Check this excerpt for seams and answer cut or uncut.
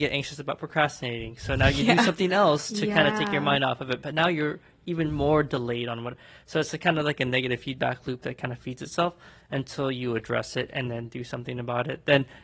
uncut